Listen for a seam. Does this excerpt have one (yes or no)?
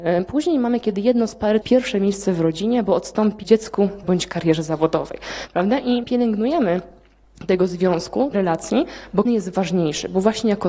yes